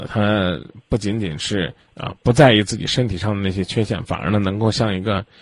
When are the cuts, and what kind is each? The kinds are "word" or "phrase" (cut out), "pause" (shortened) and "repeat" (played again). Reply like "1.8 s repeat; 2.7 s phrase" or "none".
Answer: 1.8 s pause